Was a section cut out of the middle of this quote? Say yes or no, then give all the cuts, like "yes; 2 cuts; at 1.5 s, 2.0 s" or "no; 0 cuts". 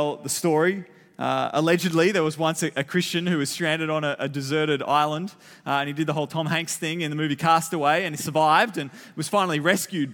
no; 0 cuts